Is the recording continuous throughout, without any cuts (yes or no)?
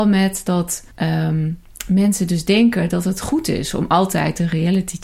no